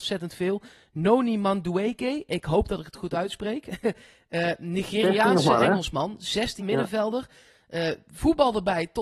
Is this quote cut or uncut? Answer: cut